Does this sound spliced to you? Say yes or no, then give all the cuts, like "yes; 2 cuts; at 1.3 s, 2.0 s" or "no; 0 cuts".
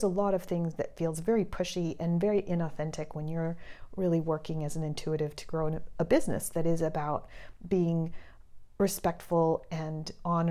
no; 0 cuts